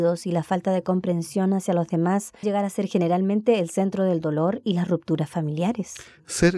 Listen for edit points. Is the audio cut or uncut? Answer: cut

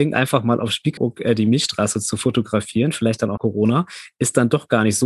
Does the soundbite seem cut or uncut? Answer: cut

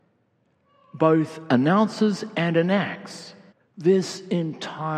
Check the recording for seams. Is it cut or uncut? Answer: cut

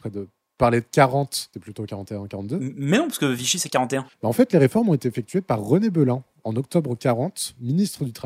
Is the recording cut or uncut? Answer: cut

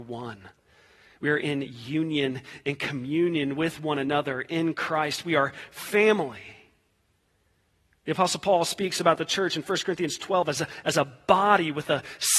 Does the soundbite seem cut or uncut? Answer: uncut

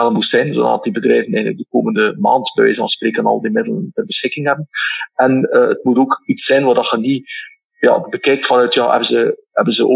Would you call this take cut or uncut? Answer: uncut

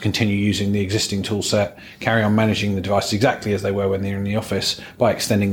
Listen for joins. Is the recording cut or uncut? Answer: uncut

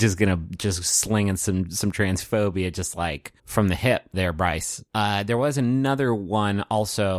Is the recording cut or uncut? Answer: cut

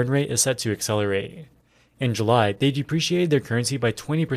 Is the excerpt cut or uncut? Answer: uncut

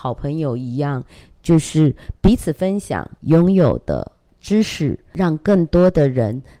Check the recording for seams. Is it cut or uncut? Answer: uncut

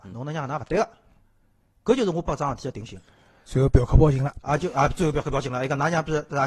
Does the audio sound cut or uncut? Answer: uncut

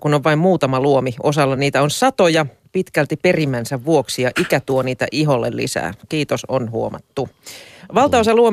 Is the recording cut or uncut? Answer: uncut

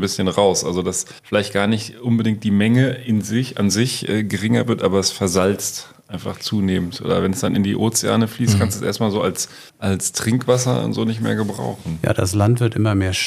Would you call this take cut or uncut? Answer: cut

